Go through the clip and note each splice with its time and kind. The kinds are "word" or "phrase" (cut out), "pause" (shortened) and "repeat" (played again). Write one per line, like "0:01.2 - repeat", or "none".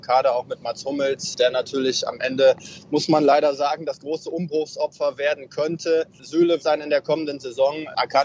0:06.6 - phrase

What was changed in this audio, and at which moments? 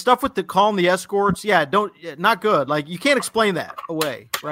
none

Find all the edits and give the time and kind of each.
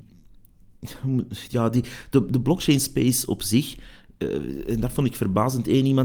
none

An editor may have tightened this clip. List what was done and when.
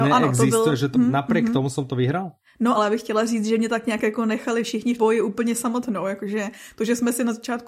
0:00.9 - word
0:02.7 - word
0:05.0 - word

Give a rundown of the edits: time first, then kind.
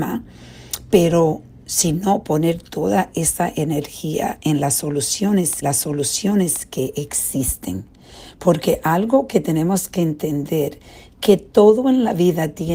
0:05.6 - repeat

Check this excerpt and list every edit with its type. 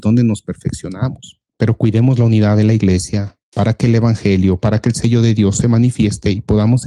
0:01.5 - pause
0:03.4 - pause

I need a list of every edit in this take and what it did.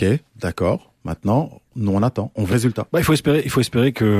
0:01.7 - pause
0:02.5 - word

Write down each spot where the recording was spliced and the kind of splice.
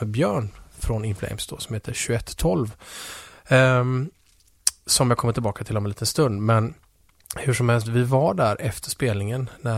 none

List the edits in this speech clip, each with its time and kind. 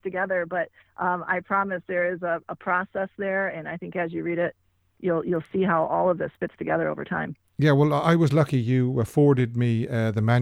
none

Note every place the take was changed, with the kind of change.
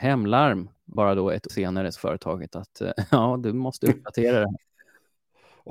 0:01.0 - phrase
0:01.5 - word
0:02.0 - word

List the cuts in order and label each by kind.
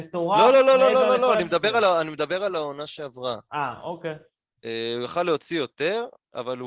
none

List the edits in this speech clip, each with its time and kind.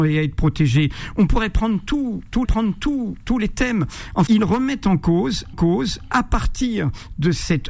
0:02.4 - repeat
0:04.3 - word
0:05.5 - repeat

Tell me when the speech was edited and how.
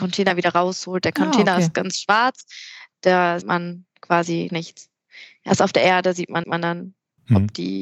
0:03.4 - word
0:04.5 - word
0:06.4 - repeat

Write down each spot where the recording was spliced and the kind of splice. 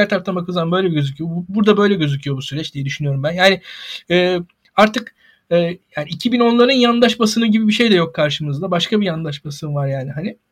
none

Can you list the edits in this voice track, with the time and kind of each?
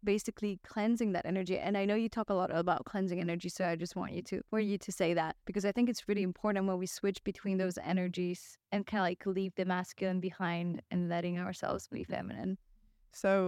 0:04.5 - pause
0:05.4 - pause
0:08.6 - pause

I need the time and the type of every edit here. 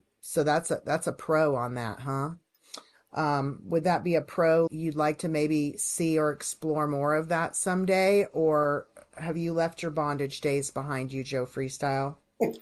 0:04.7 - word

